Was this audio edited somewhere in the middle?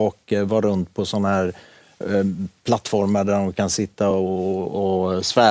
no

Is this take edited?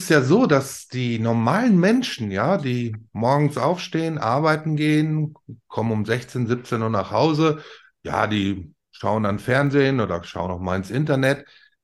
no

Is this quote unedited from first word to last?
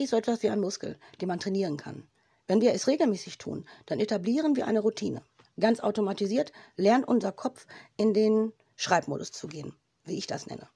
yes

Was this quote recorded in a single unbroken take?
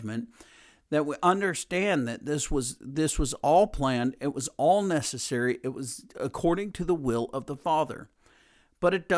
yes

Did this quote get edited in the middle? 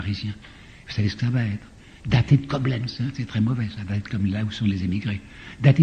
no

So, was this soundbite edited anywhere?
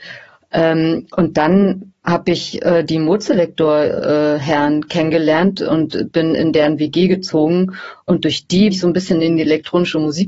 yes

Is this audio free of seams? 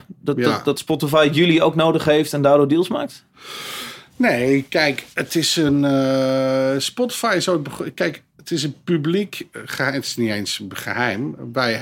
no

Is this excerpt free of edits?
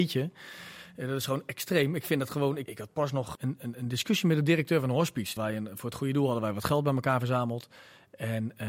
no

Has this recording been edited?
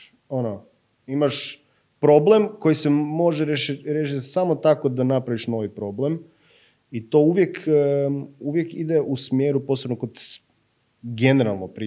no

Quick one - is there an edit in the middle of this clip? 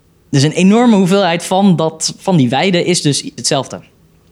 yes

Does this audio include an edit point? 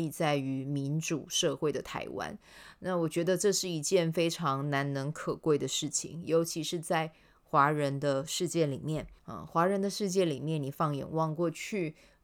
yes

